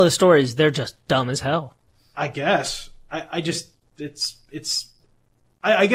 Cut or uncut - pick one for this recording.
uncut